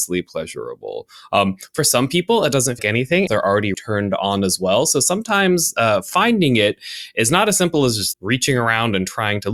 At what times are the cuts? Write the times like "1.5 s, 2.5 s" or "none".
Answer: 2.8 s, 3.3 s, 3.7 s, 8.1 s